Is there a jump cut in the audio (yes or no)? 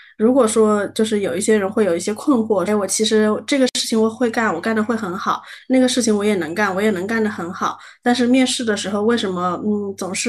yes